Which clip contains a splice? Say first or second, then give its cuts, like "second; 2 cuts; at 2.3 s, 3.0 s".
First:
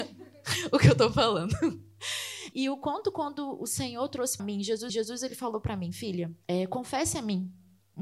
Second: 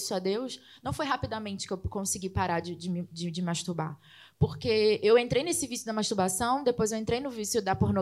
first; 4 cuts; at 2.5 s, 4.4 s, 4.9 s, 6.4 s